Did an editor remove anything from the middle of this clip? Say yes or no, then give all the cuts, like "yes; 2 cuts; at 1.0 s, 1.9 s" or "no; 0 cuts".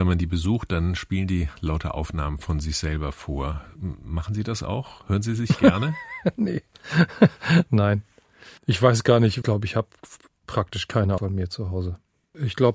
yes; 3 cuts; at 8.6 s, 9.4 s, 11.2 s